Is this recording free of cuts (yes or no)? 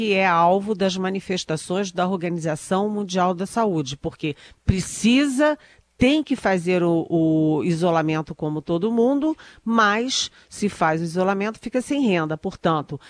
yes